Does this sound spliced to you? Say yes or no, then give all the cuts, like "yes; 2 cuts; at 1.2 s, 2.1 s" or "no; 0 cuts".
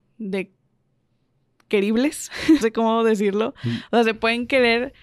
yes; 1 cut; at 2.6 s